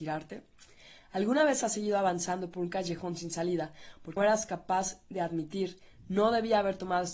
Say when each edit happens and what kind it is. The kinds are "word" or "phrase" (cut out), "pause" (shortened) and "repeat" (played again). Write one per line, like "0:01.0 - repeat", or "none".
0:04.2 - word